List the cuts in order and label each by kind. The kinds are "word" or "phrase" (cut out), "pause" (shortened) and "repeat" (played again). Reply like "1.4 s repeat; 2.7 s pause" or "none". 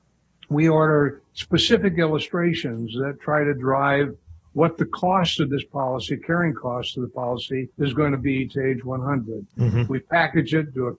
7.7 s pause